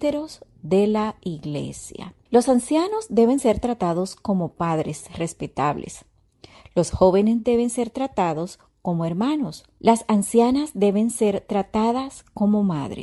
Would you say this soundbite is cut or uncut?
uncut